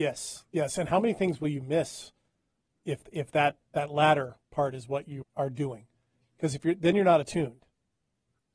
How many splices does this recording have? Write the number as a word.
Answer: one